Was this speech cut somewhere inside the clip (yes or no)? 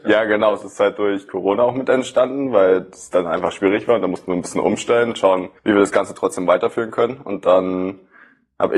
yes